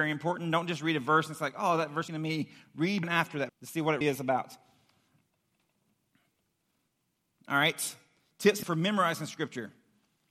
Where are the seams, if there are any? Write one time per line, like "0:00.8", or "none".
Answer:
0:02.1
0:03.0
0:03.5
0:04.0
0:08.6